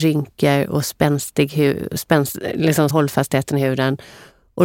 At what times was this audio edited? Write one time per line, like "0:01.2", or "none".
0:02.9